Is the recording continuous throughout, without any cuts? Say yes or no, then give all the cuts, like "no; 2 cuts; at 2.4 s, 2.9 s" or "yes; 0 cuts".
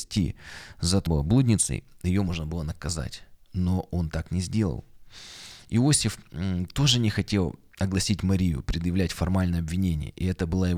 no; 2 cuts; at 1.1 s, 3.4 s